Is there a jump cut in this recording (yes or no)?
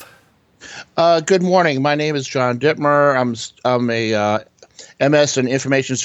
no